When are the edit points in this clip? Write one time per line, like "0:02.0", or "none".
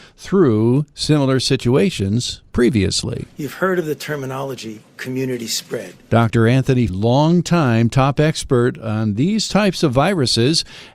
0:06.9